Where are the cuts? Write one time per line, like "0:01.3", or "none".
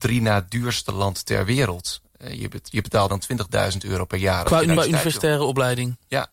0:03.1
0:04.8